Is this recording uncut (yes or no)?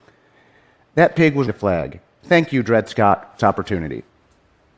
no